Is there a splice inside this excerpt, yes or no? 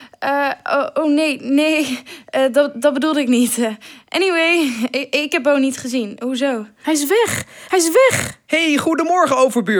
no